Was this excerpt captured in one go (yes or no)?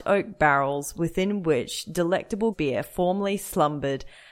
no